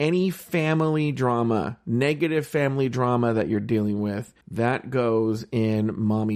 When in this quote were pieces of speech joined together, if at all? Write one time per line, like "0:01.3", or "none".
0:04.4